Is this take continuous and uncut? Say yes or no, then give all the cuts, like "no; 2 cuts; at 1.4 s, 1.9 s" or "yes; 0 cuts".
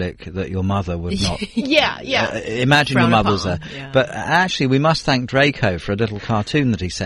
yes; 0 cuts